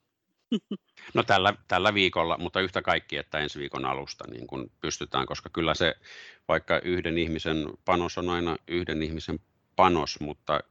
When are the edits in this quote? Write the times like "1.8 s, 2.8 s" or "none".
none